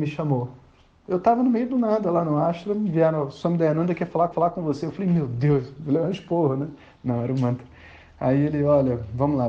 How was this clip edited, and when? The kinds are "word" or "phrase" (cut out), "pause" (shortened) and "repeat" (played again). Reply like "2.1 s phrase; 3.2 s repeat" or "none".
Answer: 4.3 s repeat